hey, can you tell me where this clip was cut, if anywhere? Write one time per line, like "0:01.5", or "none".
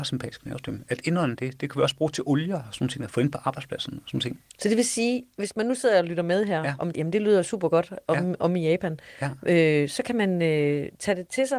0:06.9